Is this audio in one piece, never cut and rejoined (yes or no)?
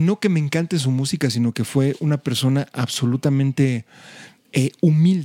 yes